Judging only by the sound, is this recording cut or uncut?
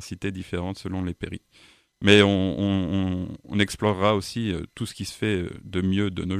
uncut